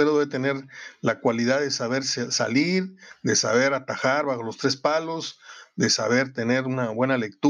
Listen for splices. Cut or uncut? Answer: uncut